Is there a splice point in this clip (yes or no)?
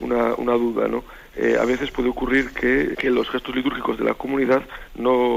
yes